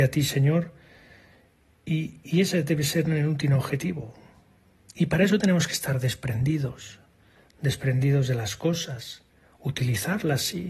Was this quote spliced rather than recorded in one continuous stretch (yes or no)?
no